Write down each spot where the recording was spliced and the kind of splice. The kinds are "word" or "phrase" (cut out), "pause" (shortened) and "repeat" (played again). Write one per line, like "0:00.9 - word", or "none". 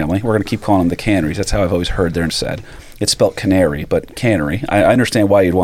0:02.3 - word

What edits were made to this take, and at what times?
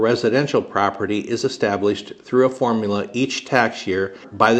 none

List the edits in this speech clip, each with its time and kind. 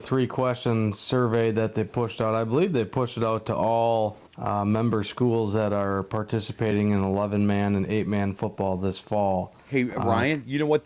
0:04.3 - pause
0:09.6 - pause

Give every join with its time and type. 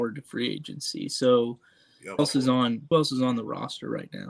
0:02.2 - word
0:02.9 - word

